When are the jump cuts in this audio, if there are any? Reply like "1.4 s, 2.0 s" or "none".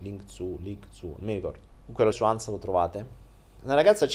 1.7 s, 2.1 s